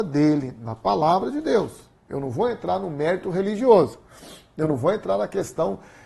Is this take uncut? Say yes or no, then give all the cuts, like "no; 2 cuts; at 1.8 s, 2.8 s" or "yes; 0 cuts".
no; 1 cut; at 2.0 s